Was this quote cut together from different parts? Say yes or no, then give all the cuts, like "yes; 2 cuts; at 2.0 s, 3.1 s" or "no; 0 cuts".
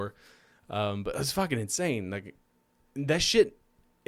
no; 0 cuts